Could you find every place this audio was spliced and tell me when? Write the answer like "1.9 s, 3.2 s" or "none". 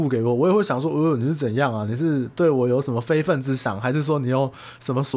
none